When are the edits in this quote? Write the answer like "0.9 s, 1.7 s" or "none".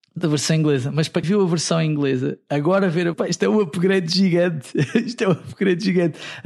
1.2 s, 3.1 s